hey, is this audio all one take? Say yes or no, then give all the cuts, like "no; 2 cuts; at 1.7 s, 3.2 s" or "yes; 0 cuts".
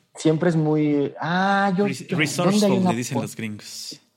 yes; 0 cuts